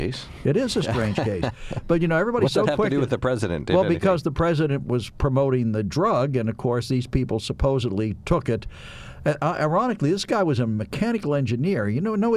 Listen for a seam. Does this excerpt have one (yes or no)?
no